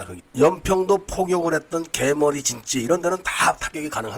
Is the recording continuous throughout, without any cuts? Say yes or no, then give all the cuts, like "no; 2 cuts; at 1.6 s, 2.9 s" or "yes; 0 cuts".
yes; 0 cuts